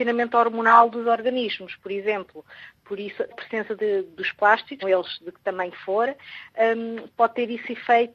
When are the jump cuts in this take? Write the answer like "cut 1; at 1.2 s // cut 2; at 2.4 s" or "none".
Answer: cut 1; at 3.3 s // cut 2; at 4.1 s // cut 3; at 4.8 s